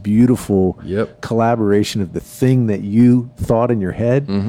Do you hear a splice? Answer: no; 0 cuts

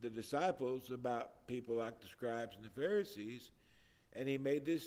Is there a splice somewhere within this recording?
no; 0 cuts

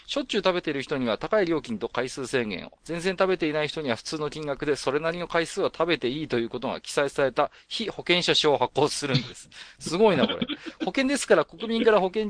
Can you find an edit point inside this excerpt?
yes; 1 cut; at 2.8 s

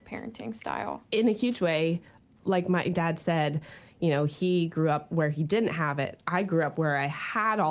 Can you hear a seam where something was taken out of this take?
no; 0 cuts

